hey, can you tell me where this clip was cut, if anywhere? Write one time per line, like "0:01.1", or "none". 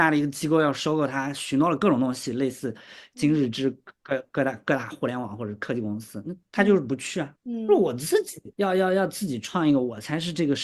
0:07.4
0:08.5